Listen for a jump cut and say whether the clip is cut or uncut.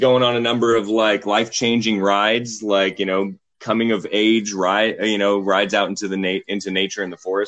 uncut